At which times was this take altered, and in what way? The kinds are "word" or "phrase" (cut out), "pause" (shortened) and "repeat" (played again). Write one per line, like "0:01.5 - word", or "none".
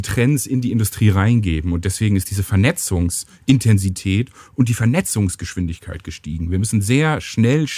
none